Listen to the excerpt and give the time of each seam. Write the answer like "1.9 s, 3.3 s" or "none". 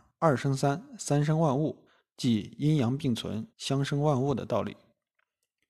1.9 s, 3.5 s